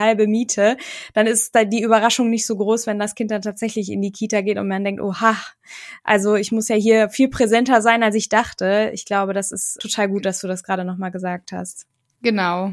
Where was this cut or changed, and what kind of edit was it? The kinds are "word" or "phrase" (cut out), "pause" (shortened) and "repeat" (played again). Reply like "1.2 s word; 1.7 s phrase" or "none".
9.8 s word